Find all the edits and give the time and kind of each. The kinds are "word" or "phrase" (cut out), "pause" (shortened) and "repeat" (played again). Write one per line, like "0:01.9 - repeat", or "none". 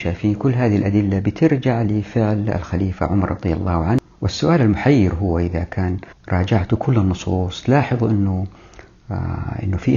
0:06.1 - pause